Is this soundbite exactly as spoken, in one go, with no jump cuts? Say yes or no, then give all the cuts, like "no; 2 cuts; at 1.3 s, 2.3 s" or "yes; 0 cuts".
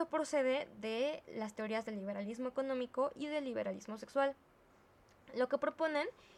yes; 0 cuts